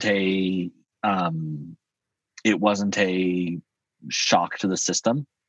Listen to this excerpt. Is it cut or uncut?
uncut